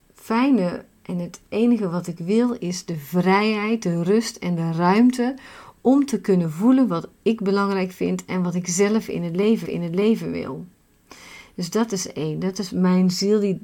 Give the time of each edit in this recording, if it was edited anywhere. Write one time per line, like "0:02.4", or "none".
0:09.6